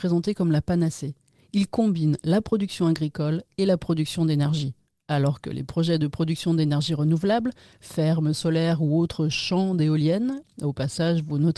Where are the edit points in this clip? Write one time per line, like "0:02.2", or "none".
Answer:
none